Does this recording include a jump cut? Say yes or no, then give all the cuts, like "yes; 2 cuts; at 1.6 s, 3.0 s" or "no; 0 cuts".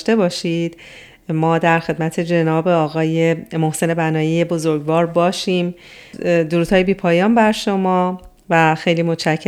no; 0 cuts